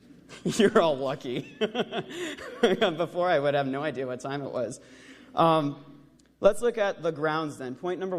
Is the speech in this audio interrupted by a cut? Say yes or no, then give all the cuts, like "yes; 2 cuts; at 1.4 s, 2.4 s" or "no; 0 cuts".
no; 0 cuts